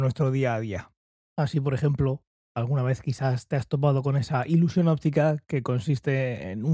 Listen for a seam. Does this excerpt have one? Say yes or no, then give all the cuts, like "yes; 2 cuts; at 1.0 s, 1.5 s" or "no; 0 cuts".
no; 0 cuts